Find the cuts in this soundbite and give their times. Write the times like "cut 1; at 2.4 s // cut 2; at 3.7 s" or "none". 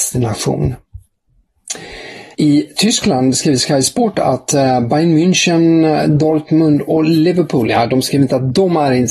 cut 1; at 2.3 s